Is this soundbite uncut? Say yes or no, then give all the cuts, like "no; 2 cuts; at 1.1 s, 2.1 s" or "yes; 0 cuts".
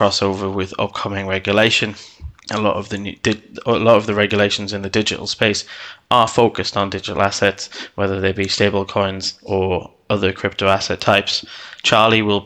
no; 1 cut; at 2.4 s